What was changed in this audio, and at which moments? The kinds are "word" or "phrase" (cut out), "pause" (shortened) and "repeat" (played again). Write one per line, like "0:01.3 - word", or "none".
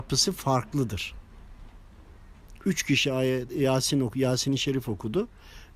none